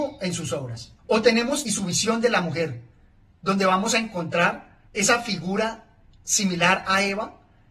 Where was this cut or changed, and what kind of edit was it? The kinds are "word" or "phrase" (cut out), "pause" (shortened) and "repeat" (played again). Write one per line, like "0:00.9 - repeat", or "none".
0:01.0 - pause
0:01.6 - phrase
0:04.9 - pause